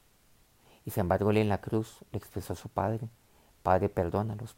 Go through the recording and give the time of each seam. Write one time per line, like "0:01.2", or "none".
none